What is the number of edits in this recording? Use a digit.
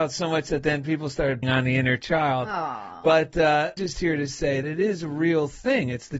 3